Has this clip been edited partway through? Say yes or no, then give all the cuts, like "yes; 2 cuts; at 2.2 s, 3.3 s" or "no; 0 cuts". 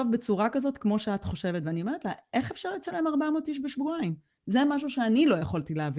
no; 0 cuts